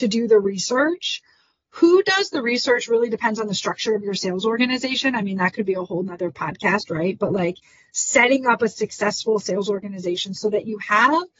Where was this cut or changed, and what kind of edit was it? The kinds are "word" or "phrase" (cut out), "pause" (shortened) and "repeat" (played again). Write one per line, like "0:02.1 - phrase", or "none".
none